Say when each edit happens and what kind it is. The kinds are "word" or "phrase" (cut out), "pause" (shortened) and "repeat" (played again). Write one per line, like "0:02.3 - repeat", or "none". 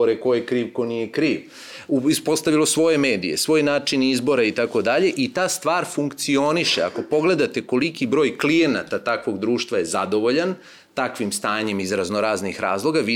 none